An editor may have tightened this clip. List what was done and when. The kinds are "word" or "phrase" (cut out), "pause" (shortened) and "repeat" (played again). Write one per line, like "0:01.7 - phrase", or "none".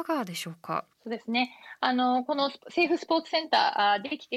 0:00.9 - pause